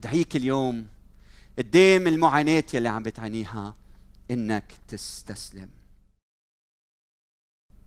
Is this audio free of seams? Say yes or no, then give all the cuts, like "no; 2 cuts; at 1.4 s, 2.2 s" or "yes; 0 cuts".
yes; 0 cuts